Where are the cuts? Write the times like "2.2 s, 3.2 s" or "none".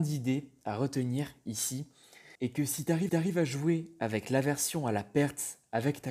2.4 s, 3.1 s